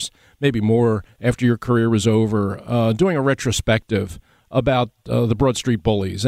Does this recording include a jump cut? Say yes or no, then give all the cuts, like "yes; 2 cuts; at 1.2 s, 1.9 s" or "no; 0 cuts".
no; 0 cuts